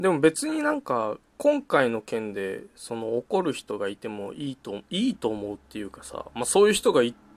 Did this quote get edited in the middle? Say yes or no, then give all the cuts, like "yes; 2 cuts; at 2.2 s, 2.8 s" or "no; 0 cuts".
yes; 1 cut; at 1.3 s